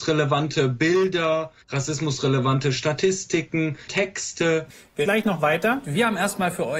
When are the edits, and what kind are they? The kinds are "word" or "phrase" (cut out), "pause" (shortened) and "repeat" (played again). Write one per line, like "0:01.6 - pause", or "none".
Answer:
0:01.6 - pause
0:03.9 - word
0:05.1 - word